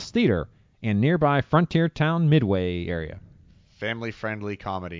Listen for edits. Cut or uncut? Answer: uncut